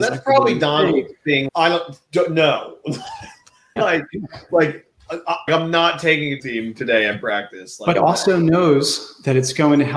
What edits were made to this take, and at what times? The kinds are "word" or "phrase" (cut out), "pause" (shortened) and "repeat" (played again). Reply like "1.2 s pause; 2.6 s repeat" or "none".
1.5 s word; 3.8 s word; 5.5 s word; 6.4 s word; 7.9 s phrase